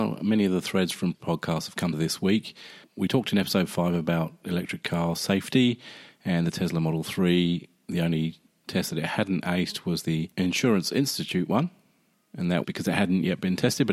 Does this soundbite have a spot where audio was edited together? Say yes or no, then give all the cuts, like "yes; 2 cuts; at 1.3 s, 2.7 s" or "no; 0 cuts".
yes; 3 cuts; at 1.1 s, 1.9 s, 12.6 s